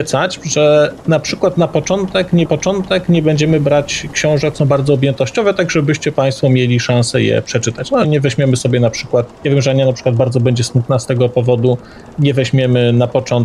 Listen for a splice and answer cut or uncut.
cut